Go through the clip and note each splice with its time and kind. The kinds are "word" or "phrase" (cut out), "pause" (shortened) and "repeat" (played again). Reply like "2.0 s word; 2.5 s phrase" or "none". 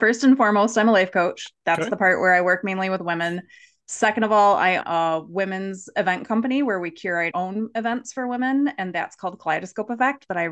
4.8 s word; 7.3 s word